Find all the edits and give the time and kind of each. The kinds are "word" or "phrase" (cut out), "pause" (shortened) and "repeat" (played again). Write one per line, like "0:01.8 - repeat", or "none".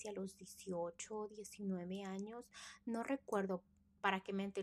none